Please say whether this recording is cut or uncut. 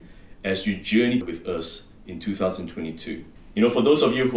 cut